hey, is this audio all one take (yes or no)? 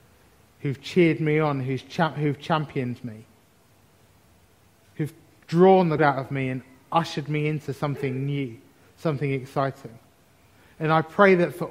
no